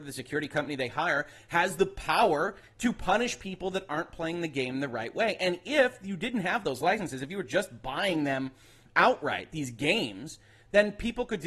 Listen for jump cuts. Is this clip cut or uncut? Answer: uncut